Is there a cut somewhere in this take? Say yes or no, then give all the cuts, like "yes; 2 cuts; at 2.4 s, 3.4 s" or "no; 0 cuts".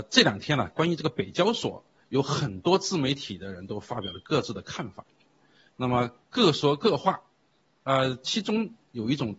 no; 0 cuts